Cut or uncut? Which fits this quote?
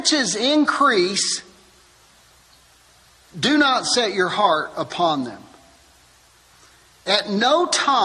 uncut